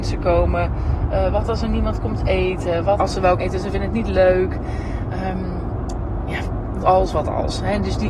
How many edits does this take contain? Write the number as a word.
three